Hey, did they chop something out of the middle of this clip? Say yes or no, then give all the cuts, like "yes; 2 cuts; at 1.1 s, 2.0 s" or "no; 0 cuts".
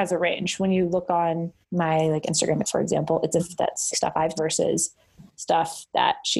yes; 5 cuts; at 1.6 s, 2.6 s, 3.4 s, 3.9 s, 4.4 s